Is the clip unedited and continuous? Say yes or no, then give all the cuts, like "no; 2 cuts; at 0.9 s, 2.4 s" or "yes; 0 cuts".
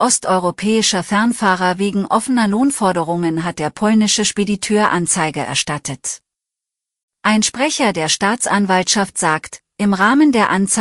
no; 1 cut; at 9.1 s